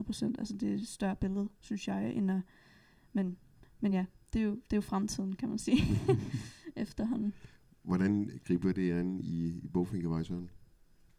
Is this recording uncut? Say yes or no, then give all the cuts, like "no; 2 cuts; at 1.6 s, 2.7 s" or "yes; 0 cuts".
yes; 0 cuts